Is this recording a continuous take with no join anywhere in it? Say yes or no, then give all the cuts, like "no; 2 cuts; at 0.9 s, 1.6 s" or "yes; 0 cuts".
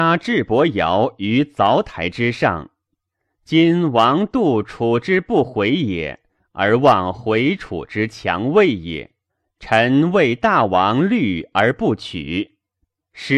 yes; 0 cuts